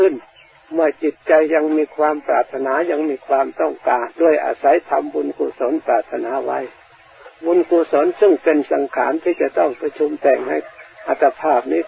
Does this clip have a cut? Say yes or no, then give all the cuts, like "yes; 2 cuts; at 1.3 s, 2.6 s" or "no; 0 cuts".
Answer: yes; 2 cuts; at 4.1 s, 7.3 s